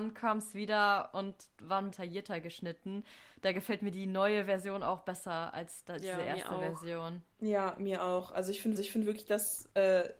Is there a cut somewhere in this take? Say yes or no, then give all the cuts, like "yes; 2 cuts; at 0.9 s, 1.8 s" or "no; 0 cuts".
yes; 3 cuts; at 1.9 s, 7.3 s, 8.8 s